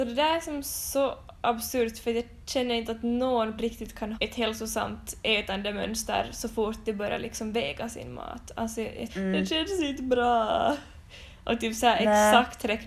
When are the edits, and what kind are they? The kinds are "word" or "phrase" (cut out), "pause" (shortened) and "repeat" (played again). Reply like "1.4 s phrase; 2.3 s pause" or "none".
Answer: 3.6 s word; 4.1 s word; 9.1 s phrase